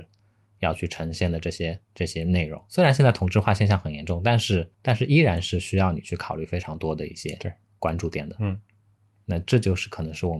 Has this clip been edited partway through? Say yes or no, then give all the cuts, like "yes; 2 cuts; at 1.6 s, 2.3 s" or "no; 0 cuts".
yes; 2 cuts; at 1.8 s, 4.7 s